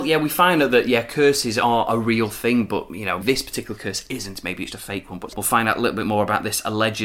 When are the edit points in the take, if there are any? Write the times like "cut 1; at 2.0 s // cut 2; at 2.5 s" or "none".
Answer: cut 1; at 3.2 s // cut 2; at 4.7 s // cut 3; at 5.3 s